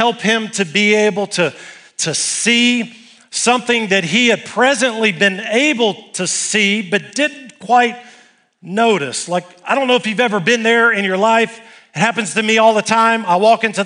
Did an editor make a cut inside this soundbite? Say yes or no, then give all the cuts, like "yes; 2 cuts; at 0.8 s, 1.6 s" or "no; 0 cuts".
no; 0 cuts